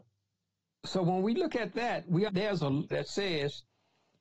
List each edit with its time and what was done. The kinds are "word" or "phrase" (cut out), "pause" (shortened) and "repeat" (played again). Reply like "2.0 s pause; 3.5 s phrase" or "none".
2.3 s word; 2.9 s phrase